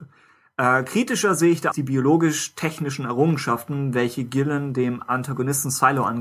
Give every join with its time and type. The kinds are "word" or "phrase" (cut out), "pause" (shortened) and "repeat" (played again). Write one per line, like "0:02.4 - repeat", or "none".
0:01.7 - word